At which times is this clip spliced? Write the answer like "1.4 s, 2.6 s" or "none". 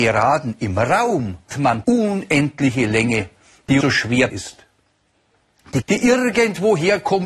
1.5 s, 1.8 s, 3.8 s, 4.3 s, 5.8 s